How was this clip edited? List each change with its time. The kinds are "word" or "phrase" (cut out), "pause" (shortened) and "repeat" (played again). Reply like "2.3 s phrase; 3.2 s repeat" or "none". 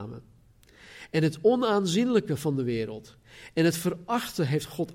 none